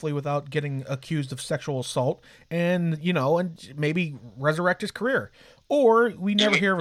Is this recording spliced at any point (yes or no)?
no